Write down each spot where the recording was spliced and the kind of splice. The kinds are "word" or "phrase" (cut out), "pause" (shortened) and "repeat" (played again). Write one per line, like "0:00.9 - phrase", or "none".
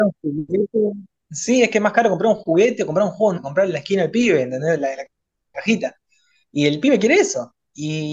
0:03.3 - word